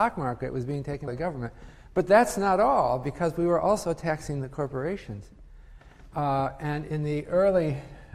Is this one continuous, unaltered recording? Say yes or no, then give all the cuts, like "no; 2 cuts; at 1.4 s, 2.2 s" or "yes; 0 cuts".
no; 1 cut; at 1.1 s